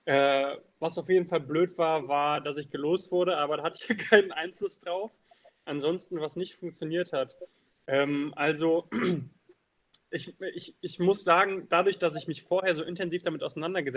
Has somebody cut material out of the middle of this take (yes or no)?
no